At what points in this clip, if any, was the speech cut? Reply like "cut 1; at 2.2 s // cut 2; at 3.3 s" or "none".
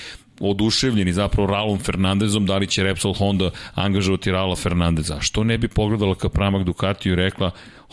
none